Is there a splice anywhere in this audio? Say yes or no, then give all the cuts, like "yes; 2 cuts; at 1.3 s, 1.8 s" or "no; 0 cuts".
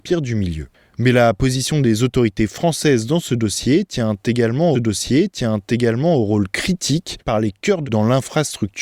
yes; 3 cuts; at 4.7 s, 7.2 s, 7.8 s